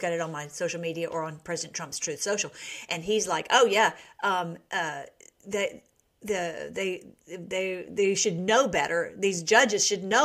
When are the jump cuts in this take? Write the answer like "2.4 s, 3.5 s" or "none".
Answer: none